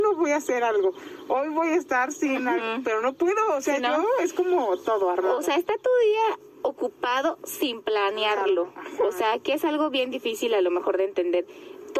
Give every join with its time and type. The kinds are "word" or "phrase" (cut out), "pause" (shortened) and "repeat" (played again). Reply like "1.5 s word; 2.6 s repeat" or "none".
none